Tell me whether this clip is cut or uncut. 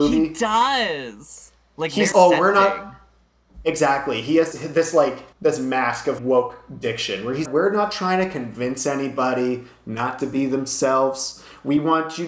cut